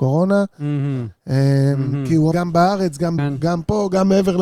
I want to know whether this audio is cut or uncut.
cut